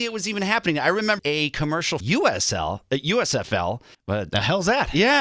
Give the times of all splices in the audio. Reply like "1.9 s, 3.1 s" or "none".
1.2 s, 2.0 s, 3.9 s